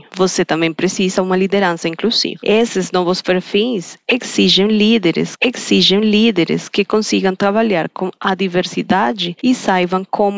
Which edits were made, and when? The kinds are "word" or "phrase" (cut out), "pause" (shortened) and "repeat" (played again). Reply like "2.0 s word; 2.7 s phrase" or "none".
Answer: 5.4 s repeat